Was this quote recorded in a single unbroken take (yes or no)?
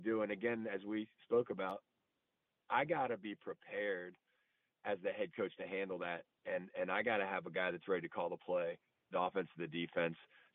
yes